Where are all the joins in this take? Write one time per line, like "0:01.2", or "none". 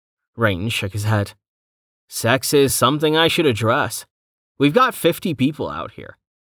none

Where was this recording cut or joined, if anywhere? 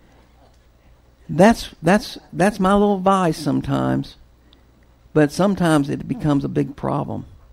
none

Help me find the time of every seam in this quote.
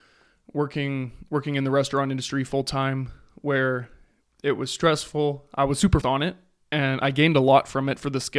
0:06.0

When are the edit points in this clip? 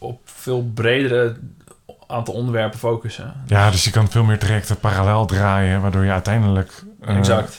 none

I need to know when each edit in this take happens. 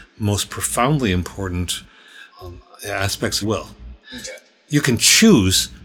0:02.3
0:03.4
0:04.0

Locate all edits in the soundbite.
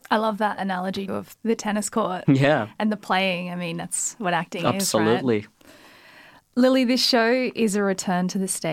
0:01.1
0:05.5

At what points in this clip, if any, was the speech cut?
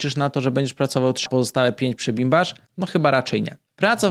0:01.3

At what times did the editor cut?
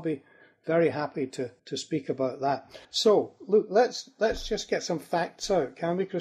0:01.6
0:02.8

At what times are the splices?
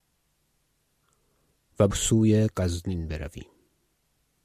0:01.9

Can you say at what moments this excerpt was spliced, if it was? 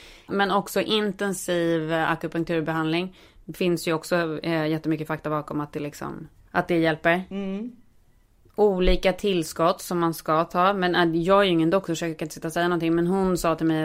none

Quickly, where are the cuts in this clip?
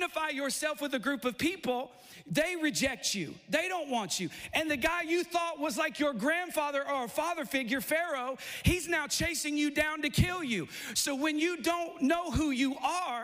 none

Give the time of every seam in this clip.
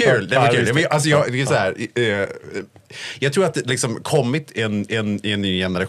0:03.7
0:04.9

